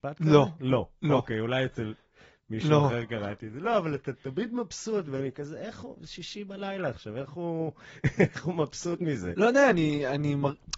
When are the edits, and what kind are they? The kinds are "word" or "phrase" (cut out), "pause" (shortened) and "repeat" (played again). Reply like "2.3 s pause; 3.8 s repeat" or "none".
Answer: none